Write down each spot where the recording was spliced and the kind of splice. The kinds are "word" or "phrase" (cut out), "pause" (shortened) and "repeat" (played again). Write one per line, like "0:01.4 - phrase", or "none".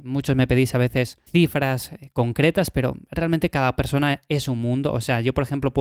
0:01.3 - pause